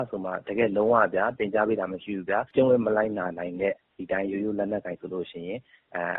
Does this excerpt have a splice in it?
yes; 1 cut; at 2.5 s

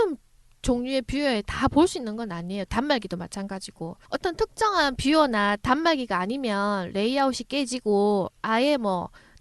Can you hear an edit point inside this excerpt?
yes; 1 cut; at 4.0 s

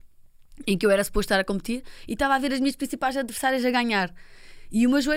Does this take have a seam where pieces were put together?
no; 0 cuts

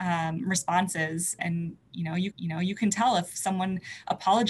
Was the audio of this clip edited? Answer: yes; 2 cuts; at 1.4 s, 2.3 s

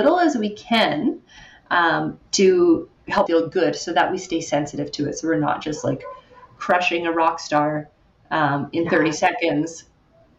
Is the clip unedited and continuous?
no; 1 cut; at 3.3 s

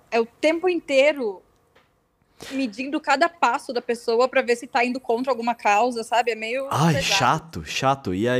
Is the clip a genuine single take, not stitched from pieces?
yes; 0 cuts

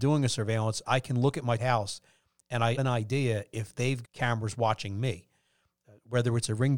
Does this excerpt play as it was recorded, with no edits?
no; 3 cuts; at 1.6 s, 2.8 s, 4.0 s

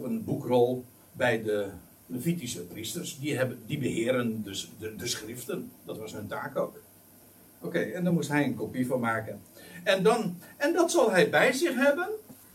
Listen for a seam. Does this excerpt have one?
no; 0 cuts

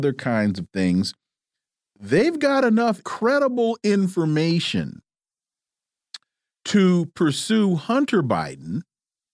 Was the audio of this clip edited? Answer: yes; 1 cut; at 3.0 s

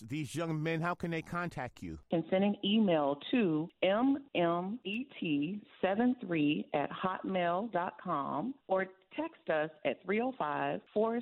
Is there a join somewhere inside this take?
no; 0 cuts

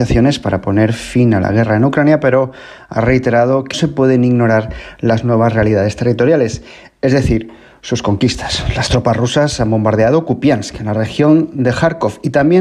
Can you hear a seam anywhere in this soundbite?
yes; 1 cut; at 3.7 s

